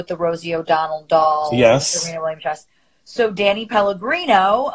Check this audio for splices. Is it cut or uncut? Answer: uncut